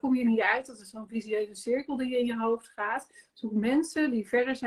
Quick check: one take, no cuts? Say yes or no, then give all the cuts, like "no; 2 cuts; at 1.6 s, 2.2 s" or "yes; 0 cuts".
yes; 0 cuts